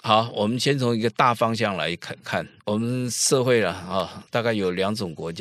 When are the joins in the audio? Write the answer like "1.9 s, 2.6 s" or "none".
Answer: 4.3 s